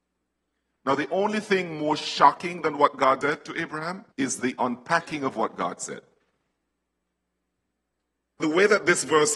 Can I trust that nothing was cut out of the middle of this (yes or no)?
no